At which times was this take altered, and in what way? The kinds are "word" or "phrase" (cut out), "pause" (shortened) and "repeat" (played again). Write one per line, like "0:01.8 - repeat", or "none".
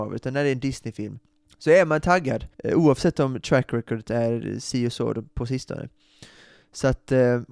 0:01.3 - pause
0:02.5 - pause